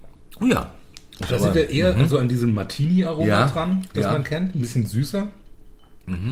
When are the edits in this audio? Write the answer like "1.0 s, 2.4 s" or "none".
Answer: 1.2 s